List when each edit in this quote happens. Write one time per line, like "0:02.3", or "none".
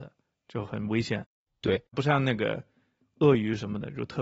0:01.9